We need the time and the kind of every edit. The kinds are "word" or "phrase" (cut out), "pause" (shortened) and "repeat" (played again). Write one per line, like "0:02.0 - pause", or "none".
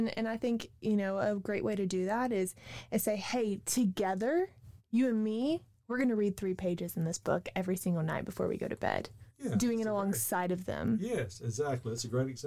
none